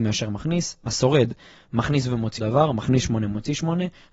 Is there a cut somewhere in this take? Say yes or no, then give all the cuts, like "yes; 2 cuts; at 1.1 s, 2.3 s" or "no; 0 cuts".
yes; 1 cut; at 2.4 s